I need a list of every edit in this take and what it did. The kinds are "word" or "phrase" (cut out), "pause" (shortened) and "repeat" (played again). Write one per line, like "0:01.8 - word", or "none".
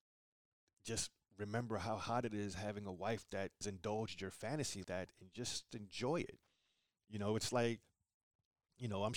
0:03.6 - word
0:04.8 - word
0:05.7 - word